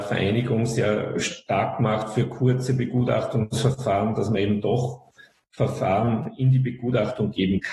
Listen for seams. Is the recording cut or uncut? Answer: uncut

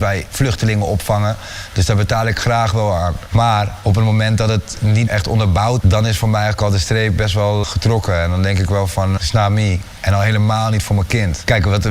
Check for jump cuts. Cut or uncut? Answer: cut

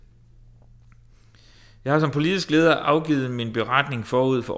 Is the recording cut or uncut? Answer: uncut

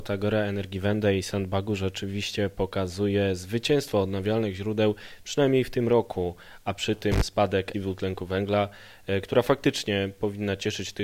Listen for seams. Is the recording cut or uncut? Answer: cut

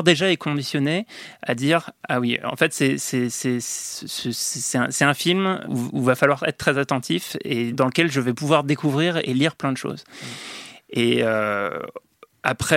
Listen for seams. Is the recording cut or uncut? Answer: cut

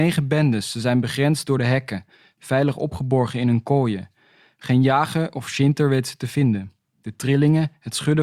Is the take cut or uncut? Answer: uncut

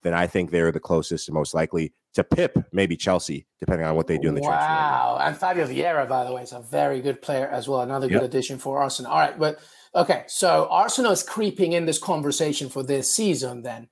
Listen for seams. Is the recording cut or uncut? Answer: uncut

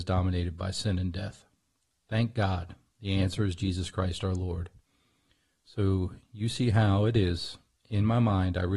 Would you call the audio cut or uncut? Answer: uncut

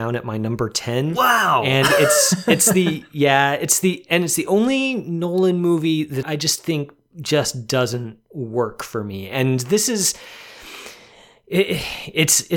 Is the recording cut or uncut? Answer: cut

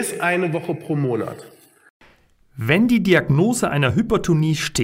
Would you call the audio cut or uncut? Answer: uncut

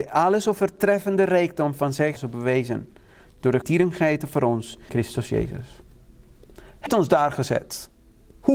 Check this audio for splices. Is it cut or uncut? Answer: cut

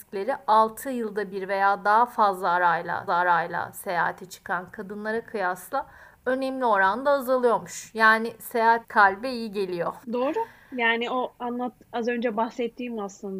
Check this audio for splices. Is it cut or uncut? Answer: cut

